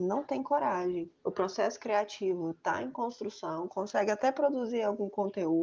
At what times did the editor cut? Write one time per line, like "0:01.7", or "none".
0:01.1